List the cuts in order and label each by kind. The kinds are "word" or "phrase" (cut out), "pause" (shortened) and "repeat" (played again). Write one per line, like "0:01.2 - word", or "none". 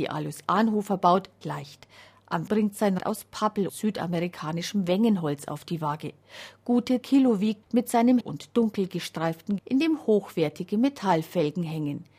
0:01.4 - word
0:02.5 - word
0:03.0 - word
0:03.7 - word
0:07.0 - word
0:07.6 - word
0:08.2 - word
0:09.6 - word